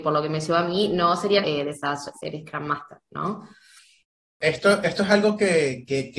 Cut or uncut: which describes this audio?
cut